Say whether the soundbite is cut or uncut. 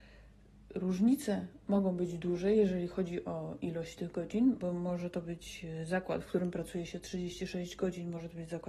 uncut